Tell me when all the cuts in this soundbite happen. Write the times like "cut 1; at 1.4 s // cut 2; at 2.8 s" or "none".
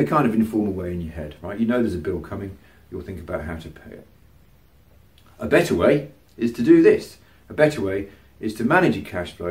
none